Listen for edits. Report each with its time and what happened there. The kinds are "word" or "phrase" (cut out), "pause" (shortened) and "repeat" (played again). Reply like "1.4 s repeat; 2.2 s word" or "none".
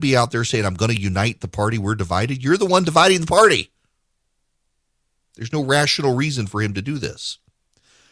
none